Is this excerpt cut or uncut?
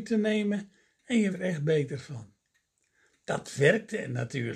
cut